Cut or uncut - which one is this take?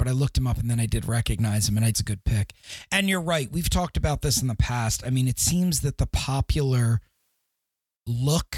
cut